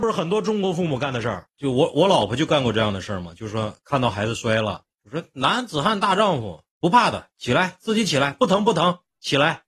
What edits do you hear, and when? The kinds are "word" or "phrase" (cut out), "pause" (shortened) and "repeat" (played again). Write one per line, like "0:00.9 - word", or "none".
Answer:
0:04.9 - pause
0:06.7 - pause